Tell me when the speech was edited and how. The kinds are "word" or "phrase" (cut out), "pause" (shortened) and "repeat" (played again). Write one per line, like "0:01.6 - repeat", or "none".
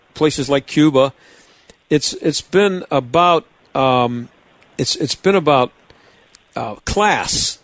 none